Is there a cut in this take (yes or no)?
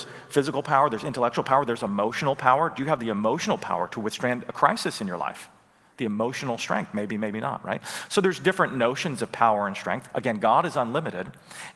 no